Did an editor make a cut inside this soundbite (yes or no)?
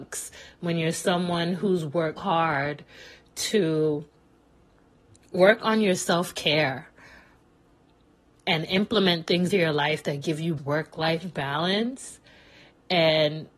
yes